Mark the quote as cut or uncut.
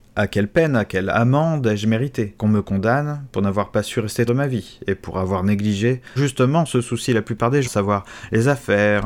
cut